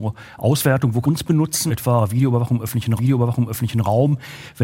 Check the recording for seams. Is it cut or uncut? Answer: cut